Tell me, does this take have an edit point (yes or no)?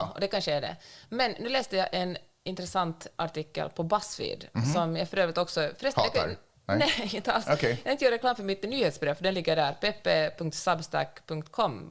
no